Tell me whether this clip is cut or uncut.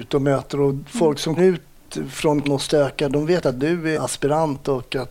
cut